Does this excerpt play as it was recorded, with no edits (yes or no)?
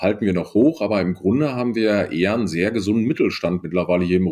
yes